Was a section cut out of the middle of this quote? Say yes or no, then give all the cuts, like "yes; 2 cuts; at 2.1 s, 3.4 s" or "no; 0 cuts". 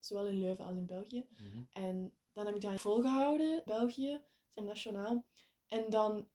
yes; 3 cuts; at 2.8 s, 3.7 s, 4.6 s